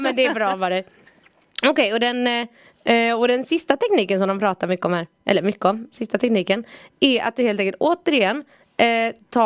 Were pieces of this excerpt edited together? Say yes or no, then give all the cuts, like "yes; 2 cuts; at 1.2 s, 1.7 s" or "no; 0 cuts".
no; 0 cuts